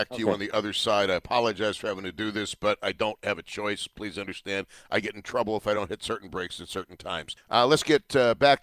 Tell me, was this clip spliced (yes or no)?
no